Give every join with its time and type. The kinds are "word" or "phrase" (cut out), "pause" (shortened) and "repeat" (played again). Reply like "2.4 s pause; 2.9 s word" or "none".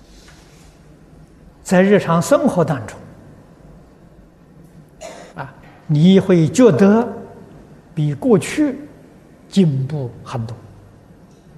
5.3 s pause